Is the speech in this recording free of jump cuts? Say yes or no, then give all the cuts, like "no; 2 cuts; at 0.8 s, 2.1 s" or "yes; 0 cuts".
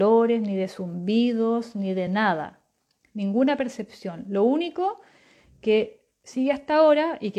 yes; 0 cuts